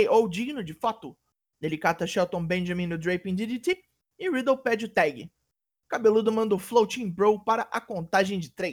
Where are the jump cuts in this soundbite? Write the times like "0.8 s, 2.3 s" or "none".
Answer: none